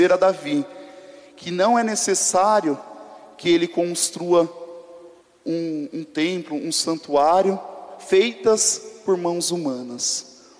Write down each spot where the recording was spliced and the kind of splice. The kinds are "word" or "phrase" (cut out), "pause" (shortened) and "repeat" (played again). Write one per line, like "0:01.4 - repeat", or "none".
0:05.2 - pause